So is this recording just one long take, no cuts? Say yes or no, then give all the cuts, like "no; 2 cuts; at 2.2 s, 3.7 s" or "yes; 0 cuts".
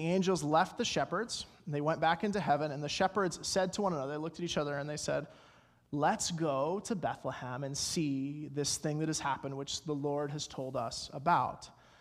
yes; 0 cuts